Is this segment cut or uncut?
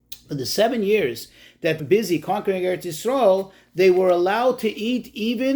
cut